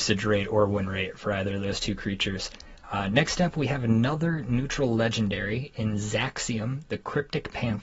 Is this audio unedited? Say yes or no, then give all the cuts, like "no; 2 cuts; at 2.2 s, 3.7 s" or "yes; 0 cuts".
yes; 0 cuts